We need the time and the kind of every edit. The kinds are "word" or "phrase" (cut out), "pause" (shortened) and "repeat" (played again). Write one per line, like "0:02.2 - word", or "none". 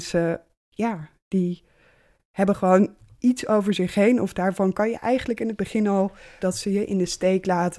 0:06.4 - word